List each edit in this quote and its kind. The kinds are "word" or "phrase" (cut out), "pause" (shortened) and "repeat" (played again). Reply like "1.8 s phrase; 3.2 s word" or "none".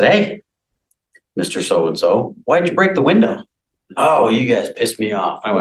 none